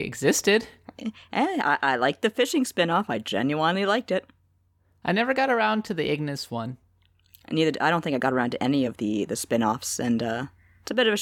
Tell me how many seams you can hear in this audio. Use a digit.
0